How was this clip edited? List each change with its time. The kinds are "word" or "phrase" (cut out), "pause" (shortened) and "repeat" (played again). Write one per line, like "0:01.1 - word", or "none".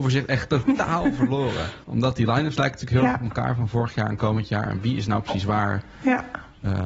0:01.8 - pause